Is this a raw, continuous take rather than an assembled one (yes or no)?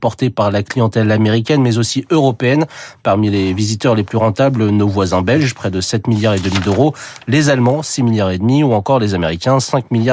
yes